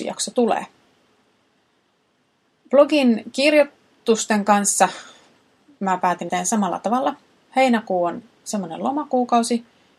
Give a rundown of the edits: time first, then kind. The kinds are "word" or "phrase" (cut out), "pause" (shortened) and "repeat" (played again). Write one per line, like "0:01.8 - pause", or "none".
0:06.3 - word